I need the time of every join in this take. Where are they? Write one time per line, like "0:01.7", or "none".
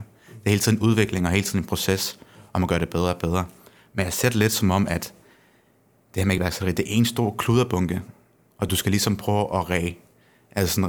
none